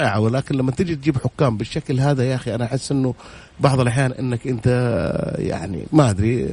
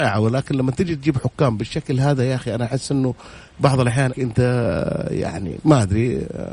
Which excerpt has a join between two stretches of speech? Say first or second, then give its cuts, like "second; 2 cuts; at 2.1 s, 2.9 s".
second; 1 cut; at 4.1 s